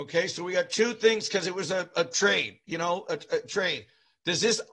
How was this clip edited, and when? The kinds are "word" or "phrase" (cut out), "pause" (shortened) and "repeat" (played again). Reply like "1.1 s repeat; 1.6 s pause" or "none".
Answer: none